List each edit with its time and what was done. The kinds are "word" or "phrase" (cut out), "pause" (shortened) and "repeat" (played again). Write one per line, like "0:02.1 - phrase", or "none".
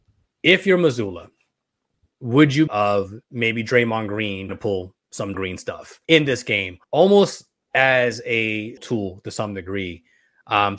0:01.9 - pause
0:02.7 - phrase
0:03.2 - pause
0:04.5 - word
0:05.3 - word
0:06.0 - pause
0:06.8 - pause
0:08.8 - word